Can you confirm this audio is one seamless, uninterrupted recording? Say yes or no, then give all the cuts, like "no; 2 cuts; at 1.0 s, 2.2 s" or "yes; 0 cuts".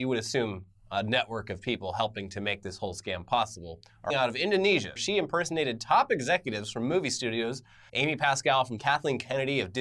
no; 4 cuts; at 4.1 s, 5.0 s, 7.9 s, 8.8 s